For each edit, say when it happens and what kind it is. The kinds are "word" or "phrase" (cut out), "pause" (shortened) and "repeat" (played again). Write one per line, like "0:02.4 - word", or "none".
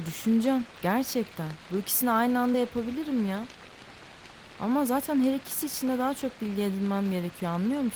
none